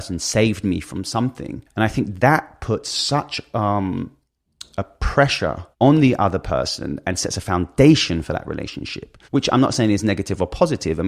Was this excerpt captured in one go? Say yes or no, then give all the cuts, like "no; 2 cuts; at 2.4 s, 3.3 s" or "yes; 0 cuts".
no; 3 cuts; at 1.7 s, 5.7 s, 9.2 s